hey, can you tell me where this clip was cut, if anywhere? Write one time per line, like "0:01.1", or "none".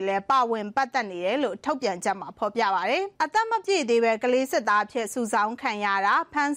0:03.2